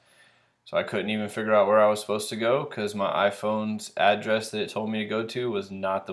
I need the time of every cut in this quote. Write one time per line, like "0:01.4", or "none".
none